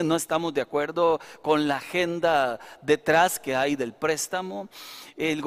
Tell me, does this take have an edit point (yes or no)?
no